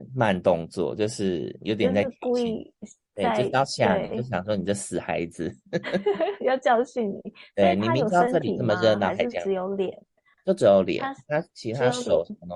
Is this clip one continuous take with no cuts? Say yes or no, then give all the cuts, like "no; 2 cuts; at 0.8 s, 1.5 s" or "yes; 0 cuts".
yes; 0 cuts